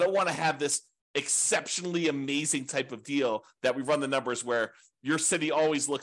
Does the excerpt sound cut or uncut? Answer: uncut